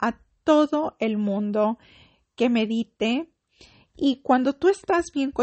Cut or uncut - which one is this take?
uncut